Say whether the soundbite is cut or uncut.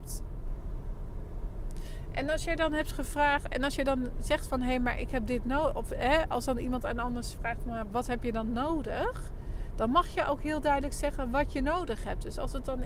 uncut